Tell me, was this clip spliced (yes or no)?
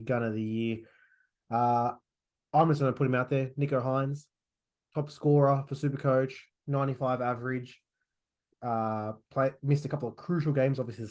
no